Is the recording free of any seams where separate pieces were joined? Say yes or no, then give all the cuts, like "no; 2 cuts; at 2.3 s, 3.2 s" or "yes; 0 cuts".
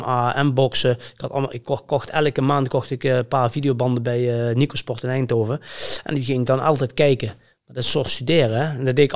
yes; 0 cuts